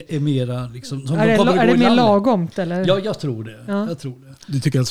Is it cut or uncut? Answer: uncut